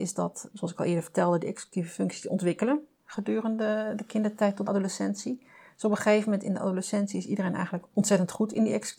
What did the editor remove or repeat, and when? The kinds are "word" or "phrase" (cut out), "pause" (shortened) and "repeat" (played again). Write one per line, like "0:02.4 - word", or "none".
0:04.7 - phrase